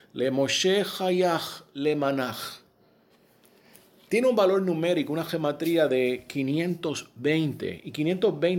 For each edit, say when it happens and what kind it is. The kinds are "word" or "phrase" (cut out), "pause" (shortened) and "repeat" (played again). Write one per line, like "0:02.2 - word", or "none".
none